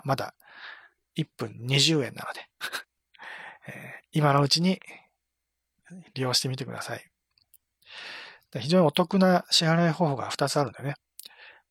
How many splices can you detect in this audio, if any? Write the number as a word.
one